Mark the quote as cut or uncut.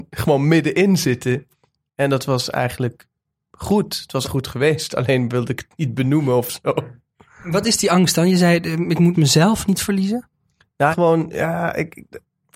cut